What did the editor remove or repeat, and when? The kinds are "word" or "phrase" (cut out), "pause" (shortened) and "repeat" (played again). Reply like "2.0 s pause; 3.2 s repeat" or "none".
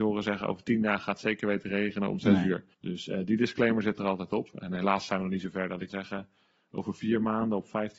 2.7 s pause; 5.9 s word